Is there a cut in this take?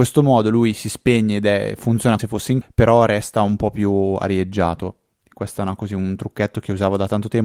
yes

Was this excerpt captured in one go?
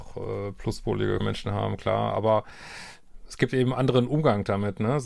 no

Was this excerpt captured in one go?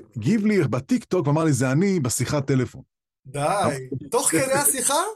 yes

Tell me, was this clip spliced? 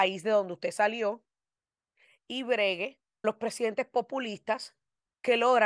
yes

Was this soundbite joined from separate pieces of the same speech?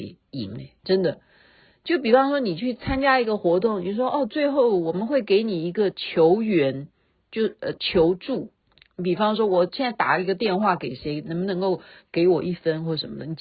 no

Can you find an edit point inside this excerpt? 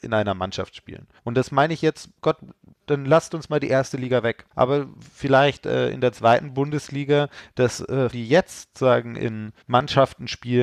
yes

